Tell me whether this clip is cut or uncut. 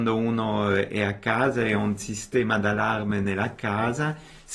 uncut